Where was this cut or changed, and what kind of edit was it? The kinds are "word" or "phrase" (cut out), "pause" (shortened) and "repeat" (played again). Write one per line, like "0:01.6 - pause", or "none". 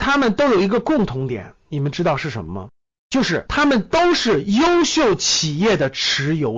none